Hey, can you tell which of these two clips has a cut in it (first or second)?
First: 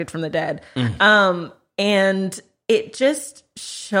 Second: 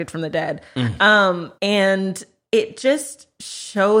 second